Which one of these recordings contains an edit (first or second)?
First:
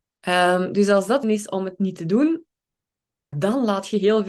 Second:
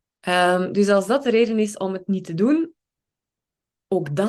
first